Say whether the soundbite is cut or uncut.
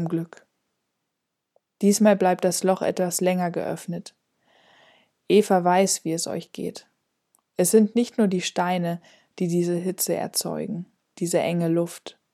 uncut